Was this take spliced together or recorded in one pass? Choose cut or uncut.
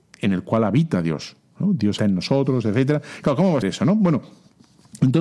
cut